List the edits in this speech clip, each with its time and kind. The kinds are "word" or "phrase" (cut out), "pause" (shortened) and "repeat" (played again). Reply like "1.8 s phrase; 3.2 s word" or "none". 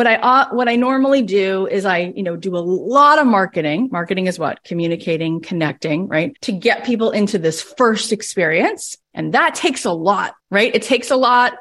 6.4 s pause; 9.0 s pause; 10.4 s pause